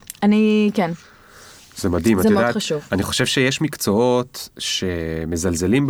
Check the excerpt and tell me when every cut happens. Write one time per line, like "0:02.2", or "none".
none